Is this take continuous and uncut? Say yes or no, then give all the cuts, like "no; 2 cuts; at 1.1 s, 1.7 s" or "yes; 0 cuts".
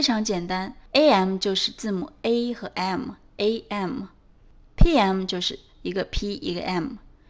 yes; 0 cuts